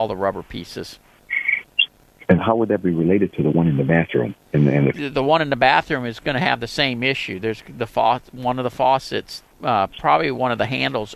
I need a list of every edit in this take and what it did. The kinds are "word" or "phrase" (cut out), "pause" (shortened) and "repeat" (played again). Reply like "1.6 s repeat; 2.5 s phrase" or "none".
2.4 s word; 4.4 s pause; 4.9 s word; 9.5 s pause